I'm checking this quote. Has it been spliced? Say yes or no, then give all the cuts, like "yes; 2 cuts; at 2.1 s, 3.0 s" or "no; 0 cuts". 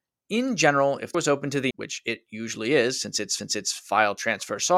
yes; 3 cuts; at 1.1 s, 1.7 s, 3.4 s